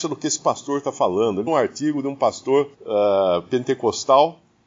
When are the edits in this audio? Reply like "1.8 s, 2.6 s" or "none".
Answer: 1.5 s, 2.7 s

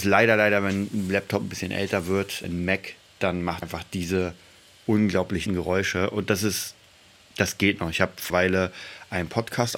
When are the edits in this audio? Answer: 2.4 s, 3.6 s, 5.5 s, 8.3 s

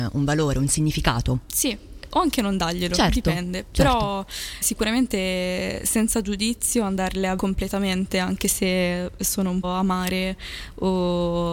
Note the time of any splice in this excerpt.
2.1 s, 4.6 s, 7.4 s, 9.6 s

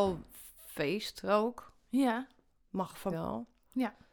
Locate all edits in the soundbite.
3.1 s

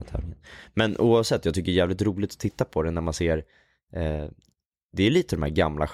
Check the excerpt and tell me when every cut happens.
none

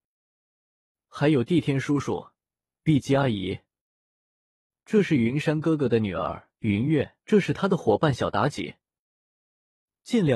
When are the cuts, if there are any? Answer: 6.5 s, 7.2 s

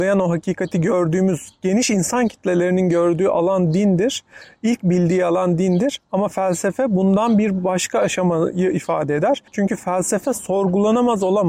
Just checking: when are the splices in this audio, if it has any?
9.5 s

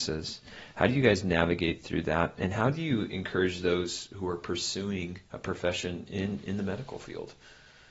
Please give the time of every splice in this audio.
5.3 s

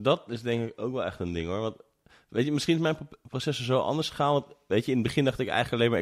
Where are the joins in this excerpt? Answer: none

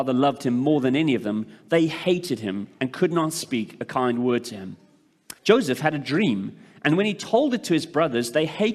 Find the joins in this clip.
5.4 s

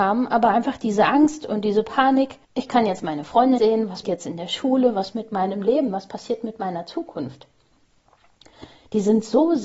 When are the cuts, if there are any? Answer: 2.4 s, 3.6 s, 4.0 s, 5.1 s

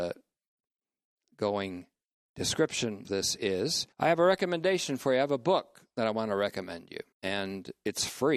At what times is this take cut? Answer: 3.0 s, 3.9 s, 7.1 s

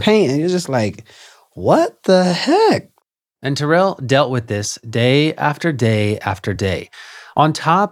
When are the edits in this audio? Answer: none

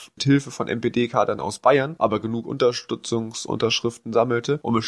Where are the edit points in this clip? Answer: none

